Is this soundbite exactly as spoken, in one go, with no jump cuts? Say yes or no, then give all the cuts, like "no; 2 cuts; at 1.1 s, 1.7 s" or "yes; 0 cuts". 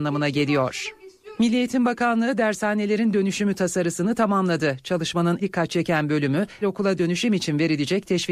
no; 2 cuts; at 5.4 s, 6.6 s